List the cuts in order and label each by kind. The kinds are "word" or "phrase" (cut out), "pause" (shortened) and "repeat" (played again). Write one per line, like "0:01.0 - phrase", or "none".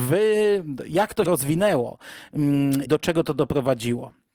0:01.3 - word
0:02.9 - word

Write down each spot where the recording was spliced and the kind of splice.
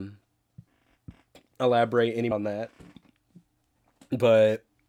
0:02.3 - word

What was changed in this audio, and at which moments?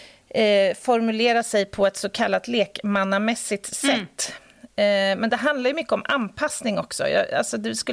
none

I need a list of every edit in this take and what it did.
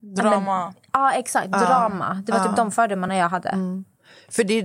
none

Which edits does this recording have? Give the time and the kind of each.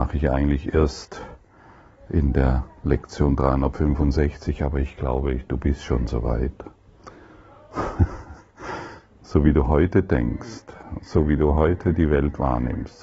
none

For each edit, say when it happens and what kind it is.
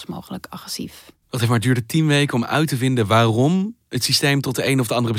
0:01.2 - pause

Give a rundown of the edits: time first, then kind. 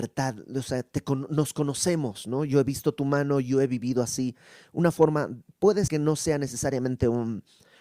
0:05.9 - word

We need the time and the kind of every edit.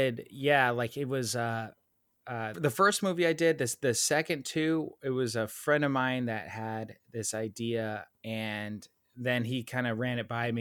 0:02.5 - word
0:08.1 - pause

